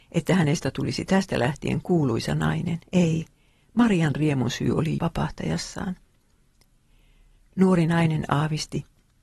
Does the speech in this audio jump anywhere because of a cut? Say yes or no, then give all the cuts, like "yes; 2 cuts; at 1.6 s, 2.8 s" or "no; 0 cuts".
yes; 2 cuts; at 2.9 s, 5.0 s